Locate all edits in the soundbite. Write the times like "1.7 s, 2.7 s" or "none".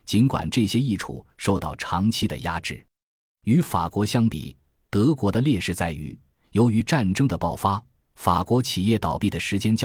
none